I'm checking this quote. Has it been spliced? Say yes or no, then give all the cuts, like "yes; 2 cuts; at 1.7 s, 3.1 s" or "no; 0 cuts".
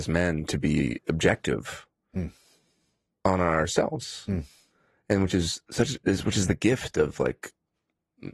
no; 0 cuts